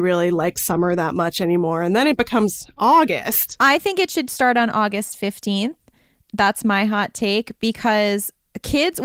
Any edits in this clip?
no; 0 cuts

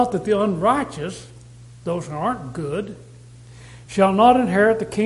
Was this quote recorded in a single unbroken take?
yes; 0 cuts

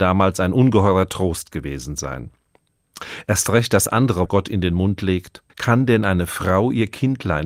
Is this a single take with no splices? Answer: no; 2 cuts; at 4.3 s, 5.5 s

